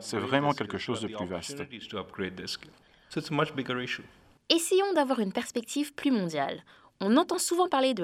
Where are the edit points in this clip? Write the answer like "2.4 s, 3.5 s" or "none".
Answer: none